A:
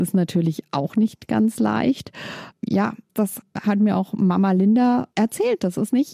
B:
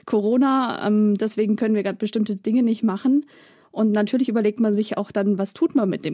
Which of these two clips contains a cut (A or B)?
A